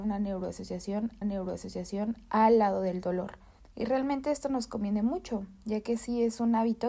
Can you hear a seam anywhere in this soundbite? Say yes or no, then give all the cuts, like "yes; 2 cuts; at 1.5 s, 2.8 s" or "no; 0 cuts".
yes; 2 cuts; at 1.2 s, 3.6 s